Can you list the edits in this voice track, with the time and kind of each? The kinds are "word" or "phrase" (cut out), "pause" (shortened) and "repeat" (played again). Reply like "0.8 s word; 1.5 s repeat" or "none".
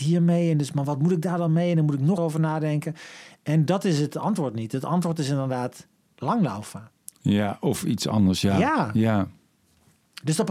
2.2 s word